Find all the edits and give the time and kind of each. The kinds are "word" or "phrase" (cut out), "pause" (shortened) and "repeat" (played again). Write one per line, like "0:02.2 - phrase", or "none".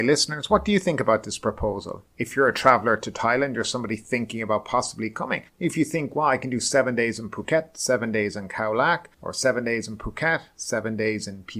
0:02.1 - pause
0:05.5 - pause
0:09.1 - pause